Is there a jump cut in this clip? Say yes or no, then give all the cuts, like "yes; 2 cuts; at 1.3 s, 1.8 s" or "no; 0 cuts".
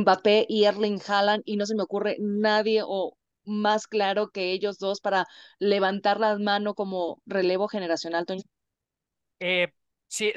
no; 0 cuts